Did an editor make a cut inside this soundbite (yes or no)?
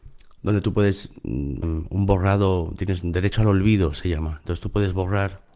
yes